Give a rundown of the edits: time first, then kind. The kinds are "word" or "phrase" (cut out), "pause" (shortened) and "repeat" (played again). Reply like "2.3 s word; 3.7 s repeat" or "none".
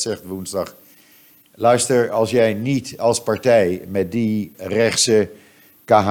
4.5 s word